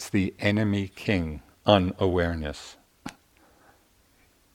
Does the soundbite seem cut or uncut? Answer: cut